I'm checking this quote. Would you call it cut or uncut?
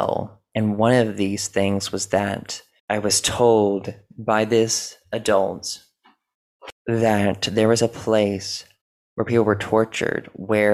cut